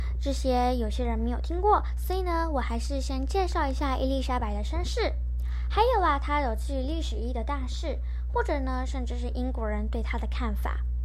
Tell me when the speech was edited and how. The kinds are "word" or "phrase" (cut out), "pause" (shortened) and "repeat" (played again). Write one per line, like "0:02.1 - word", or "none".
none